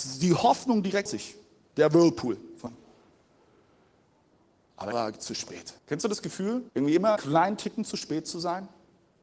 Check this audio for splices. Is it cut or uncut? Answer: cut